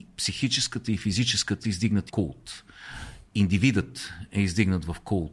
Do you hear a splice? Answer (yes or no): yes